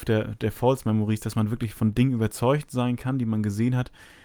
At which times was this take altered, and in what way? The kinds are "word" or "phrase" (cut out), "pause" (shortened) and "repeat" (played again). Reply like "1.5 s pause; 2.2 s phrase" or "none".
none